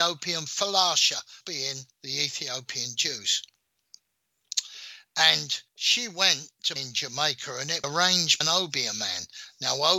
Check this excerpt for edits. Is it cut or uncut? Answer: cut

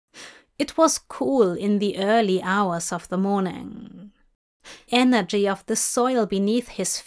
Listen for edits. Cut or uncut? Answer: cut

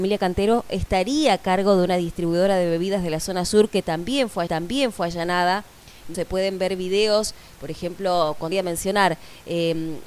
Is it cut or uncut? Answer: cut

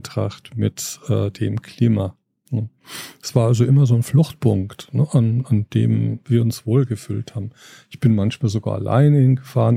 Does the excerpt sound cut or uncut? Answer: uncut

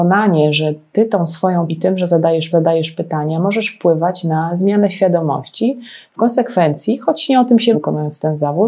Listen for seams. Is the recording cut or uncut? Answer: cut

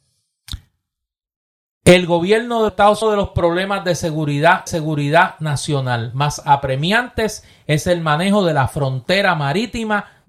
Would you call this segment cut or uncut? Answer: cut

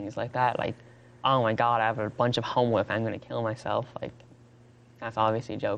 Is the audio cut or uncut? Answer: uncut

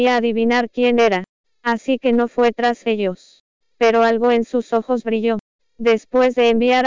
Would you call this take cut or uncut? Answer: uncut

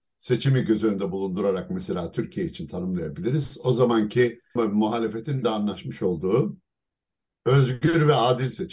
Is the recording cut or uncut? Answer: cut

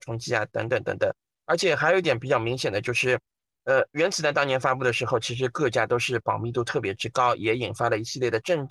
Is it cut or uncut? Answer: uncut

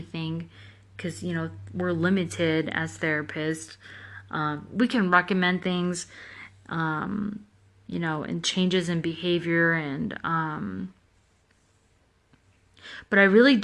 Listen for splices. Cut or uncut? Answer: uncut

